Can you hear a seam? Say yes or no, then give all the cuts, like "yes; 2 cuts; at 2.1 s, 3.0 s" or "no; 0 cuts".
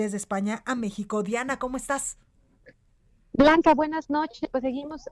no; 0 cuts